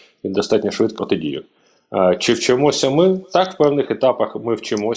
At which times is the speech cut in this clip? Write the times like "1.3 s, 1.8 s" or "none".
1.0 s